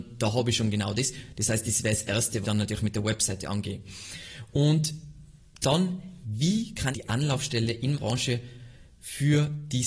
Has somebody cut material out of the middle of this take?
yes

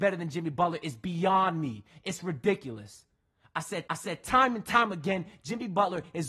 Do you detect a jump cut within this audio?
yes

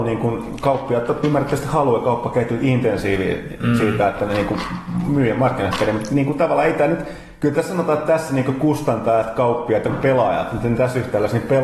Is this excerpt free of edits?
yes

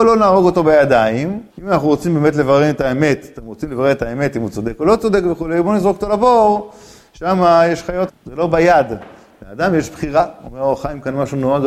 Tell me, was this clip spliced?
yes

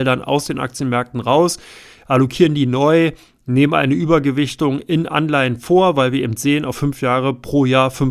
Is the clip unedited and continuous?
yes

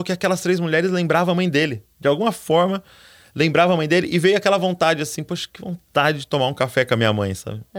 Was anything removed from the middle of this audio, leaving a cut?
no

